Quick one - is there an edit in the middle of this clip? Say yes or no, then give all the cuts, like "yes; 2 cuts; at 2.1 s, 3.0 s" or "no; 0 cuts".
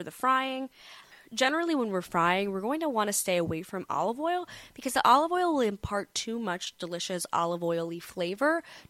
no; 0 cuts